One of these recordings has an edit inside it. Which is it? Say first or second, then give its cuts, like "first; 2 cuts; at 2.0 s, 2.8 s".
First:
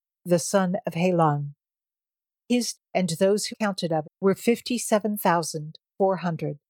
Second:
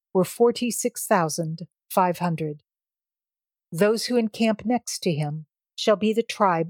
first; 3 cuts; at 2.7 s, 3.5 s, 4.0 s